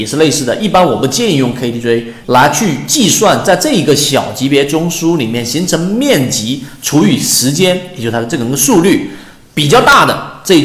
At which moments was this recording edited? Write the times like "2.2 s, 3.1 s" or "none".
2.2 s